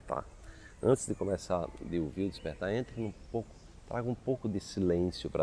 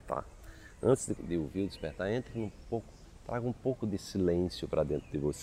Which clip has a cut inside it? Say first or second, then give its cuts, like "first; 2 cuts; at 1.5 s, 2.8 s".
second; 1 cut; at 1.2 s